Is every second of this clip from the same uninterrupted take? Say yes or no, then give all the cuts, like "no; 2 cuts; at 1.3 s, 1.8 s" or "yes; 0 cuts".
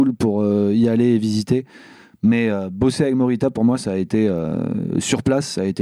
yes; 0 cuts